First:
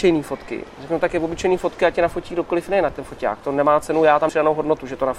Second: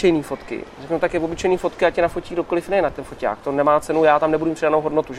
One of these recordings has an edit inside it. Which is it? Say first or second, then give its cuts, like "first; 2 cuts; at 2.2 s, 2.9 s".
first; 1 cut; at 4.3 s